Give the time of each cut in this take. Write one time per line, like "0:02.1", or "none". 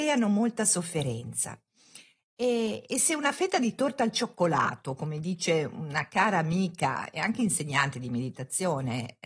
none

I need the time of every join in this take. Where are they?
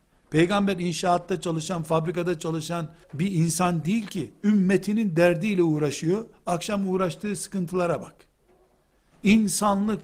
0:03.0

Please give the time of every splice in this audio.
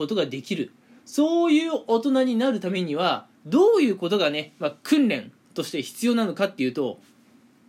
0:03.3

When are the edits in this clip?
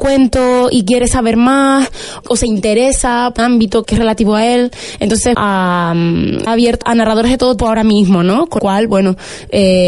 0:02.2
0:03.4
0:03.8
0:05.3
0:06.5
0:06.8
0:07.6
0:08.6

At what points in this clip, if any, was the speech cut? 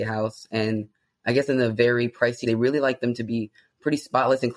0:02.4

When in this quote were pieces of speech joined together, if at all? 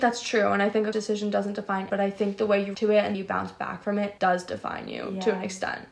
0:00.9
0:01.9
0:02.7
0:03.1
0:04.2

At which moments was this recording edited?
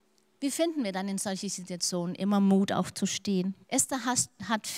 0:03.6

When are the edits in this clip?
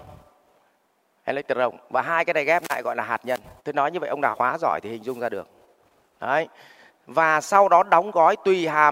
0:03.6
0:04.3

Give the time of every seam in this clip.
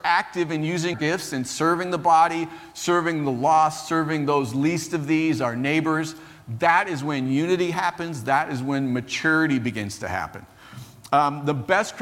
0:00.9

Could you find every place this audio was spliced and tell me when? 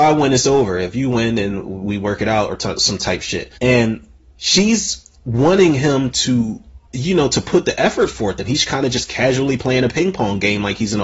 0:03.6
0:06.9

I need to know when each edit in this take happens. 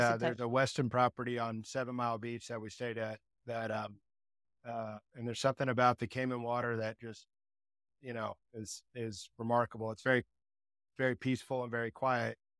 none

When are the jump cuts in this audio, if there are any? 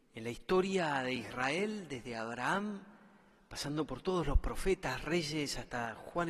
none

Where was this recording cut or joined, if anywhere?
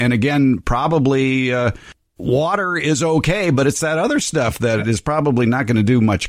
none

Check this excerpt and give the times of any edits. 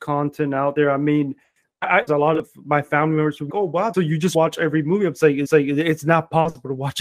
0:02.1
0:03.5
0:03.9
0:05.4

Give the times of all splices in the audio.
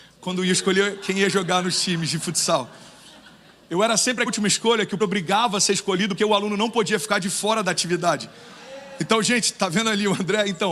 0:04.3
0:05.0
0:06.2

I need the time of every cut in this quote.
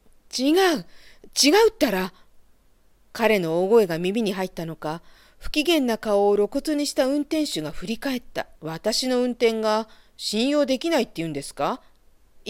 0:08.5

